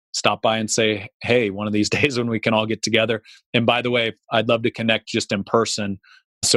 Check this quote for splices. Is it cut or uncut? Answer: uncut